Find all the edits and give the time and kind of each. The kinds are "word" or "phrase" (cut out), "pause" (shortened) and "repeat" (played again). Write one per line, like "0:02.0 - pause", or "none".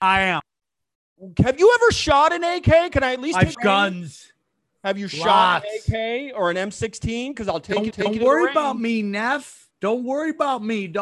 0:03.5 - word
0:07.9 - repeat
0:09.7 - pause